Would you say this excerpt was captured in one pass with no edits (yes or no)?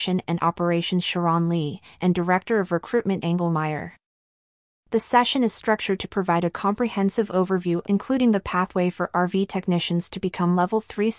no